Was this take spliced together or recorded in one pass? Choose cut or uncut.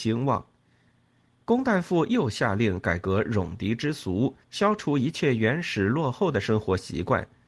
cut